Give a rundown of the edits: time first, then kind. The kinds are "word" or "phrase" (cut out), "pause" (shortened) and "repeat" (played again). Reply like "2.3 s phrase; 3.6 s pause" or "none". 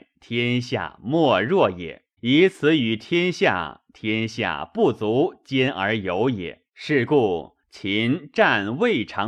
2.2 s pause; 6.7 s pause